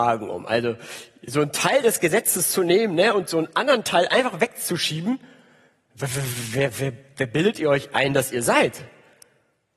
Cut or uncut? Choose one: uncut